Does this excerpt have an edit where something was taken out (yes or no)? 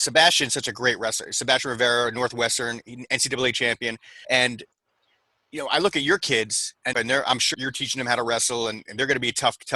yes